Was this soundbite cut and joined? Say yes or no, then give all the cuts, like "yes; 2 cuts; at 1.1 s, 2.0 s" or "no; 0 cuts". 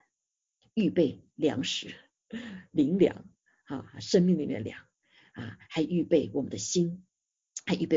no; 0 cuts